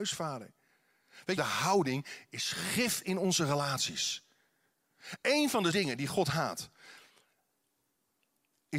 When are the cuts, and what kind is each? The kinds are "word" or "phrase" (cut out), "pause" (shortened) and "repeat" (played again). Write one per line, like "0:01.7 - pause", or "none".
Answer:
0:01.4 - phrase
0:05.7 - word